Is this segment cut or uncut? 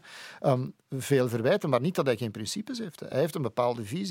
uncut